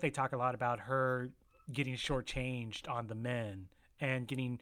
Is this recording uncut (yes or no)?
yes